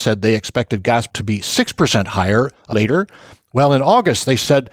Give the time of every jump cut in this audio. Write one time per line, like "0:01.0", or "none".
0:01.1
0:02.7

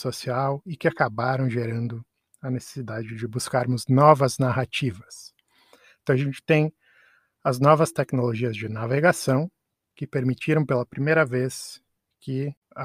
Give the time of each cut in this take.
none

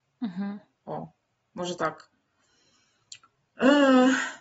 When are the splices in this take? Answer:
none

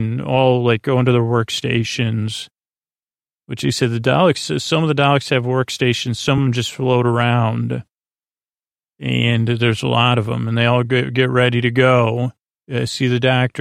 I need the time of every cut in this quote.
none

